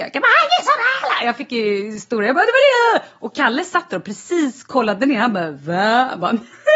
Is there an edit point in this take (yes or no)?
no